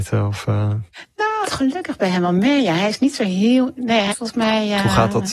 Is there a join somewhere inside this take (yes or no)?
yes